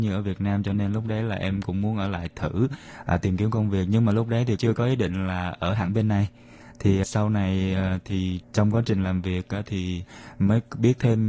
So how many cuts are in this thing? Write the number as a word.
three